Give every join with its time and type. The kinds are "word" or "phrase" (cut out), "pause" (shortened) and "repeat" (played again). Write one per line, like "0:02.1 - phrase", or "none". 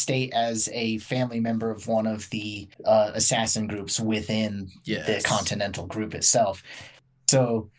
0:02.7 - pause